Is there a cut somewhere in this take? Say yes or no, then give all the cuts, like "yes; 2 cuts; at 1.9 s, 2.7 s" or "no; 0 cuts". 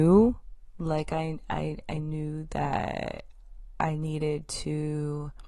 no; 0 cuts